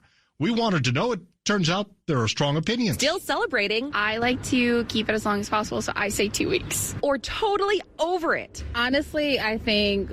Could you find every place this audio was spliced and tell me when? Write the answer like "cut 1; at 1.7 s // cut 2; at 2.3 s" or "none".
none